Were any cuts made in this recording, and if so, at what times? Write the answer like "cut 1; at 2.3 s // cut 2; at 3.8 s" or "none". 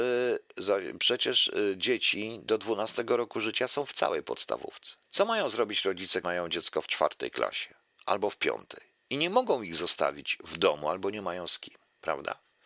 cut 1; at 5.0 s // cut 2; at 6.2 s // cut 3; at 7.9 s // cut 4; at 9.0 s